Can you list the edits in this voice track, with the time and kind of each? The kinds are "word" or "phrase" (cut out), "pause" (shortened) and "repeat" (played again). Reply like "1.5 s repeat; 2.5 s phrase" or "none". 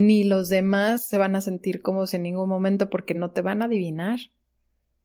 none